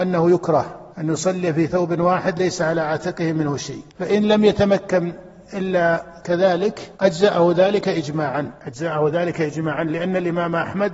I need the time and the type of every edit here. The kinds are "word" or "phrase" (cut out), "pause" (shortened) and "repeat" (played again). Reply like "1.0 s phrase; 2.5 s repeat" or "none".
0.9 s pause; 3.9 s pause; 6.9 s pause; 8.6 s pause